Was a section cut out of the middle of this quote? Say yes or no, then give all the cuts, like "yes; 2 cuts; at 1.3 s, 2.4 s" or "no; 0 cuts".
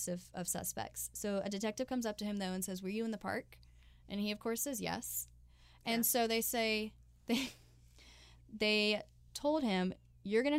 no; 0 cuts